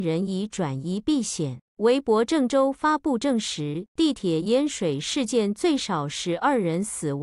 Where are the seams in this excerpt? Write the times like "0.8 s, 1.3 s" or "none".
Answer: 1.7 s